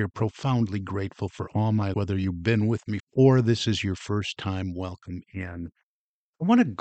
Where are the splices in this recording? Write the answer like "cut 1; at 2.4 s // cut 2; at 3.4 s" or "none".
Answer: cut 1; at 1.9 s // cut 2; at 3.0 s